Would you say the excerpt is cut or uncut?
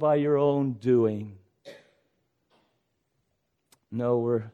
uncut